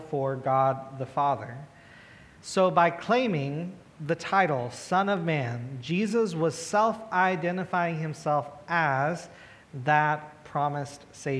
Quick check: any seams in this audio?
no; 0 cuts

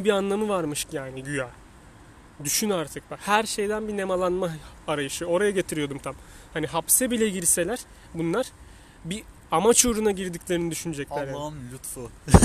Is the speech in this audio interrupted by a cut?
no; 0 cuts

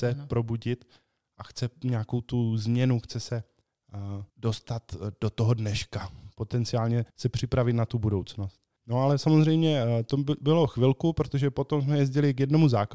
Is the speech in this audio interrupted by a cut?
yes; 3 cuts; at 4.3 s, 7.1 s, 8.8 s

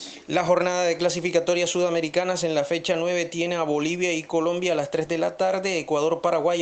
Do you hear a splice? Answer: no; 0 cuts

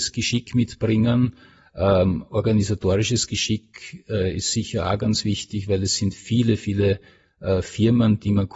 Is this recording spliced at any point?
no; 0 cuts

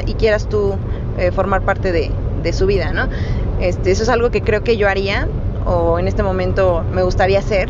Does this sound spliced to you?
no; 0 cuts

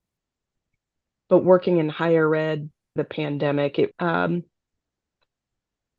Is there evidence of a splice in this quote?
yes; 2 cuts; at 3.0 s, 3.9 s

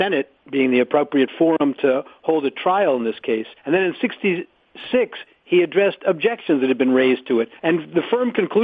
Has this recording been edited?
yes; 2 cuts; at 3.6 s, 7.6 s

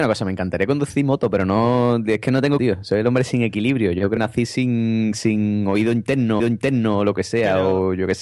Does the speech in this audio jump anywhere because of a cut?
yes; 3 cuts; at 2.6 s, 4.2 s, 6.4 s

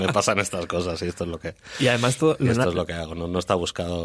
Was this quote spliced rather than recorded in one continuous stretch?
no; 0 cuts

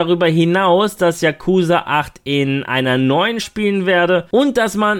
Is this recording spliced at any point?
yes; 1 cut; at 3.4 s

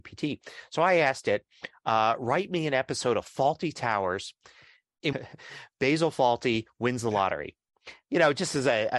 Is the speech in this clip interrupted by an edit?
yes; 1 cut; at 5.1 s

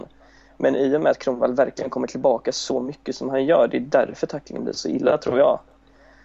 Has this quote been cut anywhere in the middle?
no; 0 cuts

